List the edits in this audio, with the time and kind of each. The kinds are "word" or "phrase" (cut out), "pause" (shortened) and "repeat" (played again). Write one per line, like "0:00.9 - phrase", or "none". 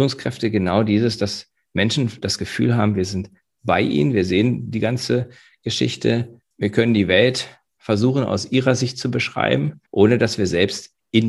0:06.5 - pause
0:09.9 - pause

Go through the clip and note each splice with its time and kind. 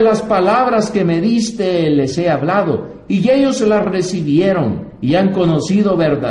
none

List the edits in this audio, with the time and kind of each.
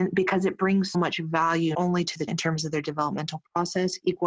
0:00.9 - word
0:01.7 - word
0:02.3 - word

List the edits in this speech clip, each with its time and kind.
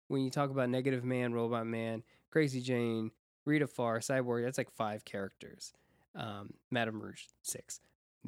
none

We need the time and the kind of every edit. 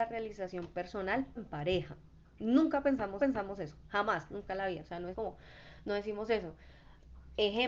0:01.4 - word
0:03.2 - repeat
0:05.1 - word

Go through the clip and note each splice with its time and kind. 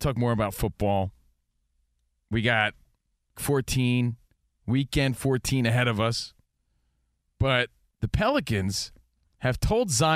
0:03.4 - word

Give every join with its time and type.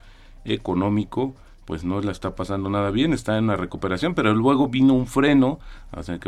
none

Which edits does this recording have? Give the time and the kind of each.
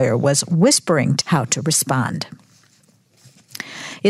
0:01.2 - word

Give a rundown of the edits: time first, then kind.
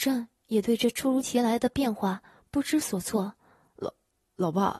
none

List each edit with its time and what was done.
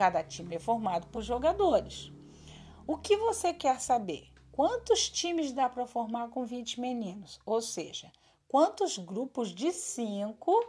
0:01.1 - word

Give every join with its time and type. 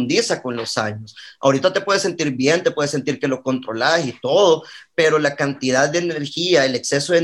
none

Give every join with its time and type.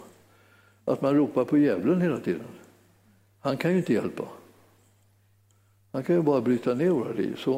none

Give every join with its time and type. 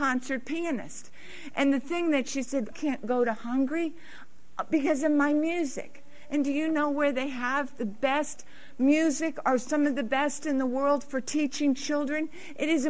0:02.7 - word

